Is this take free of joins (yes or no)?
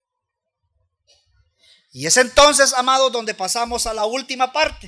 yes